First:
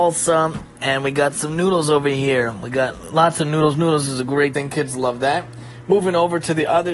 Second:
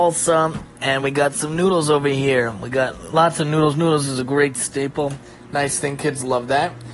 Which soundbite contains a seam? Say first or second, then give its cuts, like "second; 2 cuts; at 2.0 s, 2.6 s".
first; 1 cut; at 4.5 s